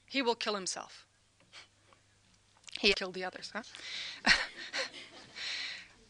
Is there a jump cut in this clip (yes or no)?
yes